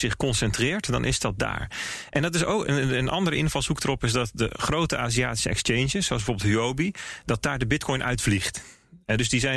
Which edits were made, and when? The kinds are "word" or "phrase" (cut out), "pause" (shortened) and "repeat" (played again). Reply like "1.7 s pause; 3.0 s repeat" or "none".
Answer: none